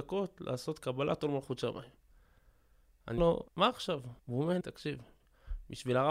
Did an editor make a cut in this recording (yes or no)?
yes